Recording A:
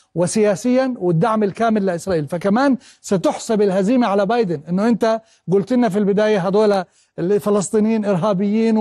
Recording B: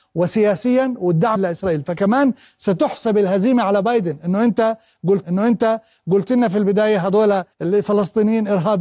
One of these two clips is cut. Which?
B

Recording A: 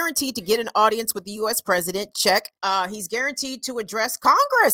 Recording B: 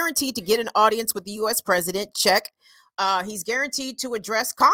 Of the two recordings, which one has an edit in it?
A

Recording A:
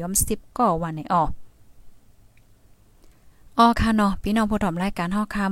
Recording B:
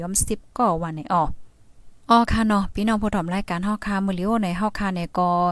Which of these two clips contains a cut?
B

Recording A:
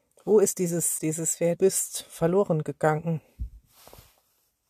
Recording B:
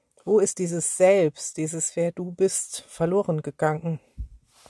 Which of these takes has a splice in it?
A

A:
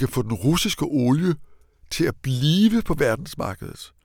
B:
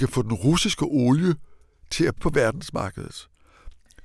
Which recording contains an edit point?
B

